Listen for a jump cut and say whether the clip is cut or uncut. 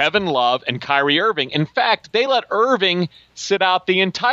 uncut